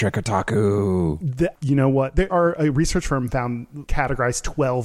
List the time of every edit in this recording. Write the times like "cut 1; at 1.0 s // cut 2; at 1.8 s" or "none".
cut 1; at 1.5 s // cut 2; at 2.3 s // cut 3; at 3.8 s